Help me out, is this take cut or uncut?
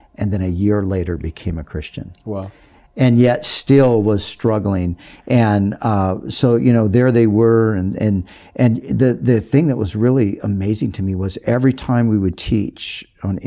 uncut